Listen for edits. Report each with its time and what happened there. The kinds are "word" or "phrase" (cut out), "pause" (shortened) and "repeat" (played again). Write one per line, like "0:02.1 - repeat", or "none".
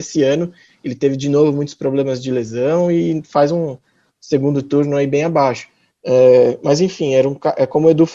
none